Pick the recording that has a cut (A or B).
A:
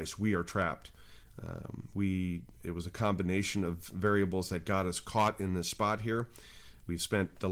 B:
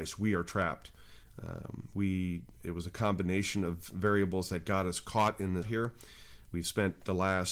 B